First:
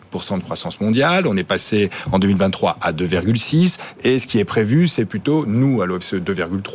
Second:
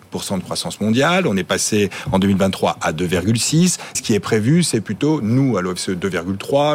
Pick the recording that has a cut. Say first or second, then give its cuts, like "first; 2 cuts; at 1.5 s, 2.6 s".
second; 1 cut; at 3.9 s